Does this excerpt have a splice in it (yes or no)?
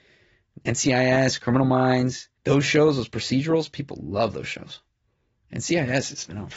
yes